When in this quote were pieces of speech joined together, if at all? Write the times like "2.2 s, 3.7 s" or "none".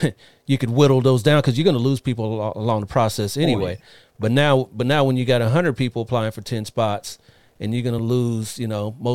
none